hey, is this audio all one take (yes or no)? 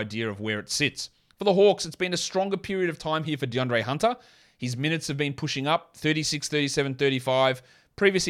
yes